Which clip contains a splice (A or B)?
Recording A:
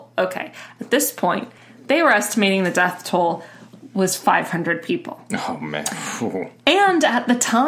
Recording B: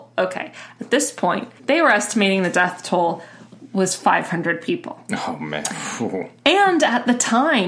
B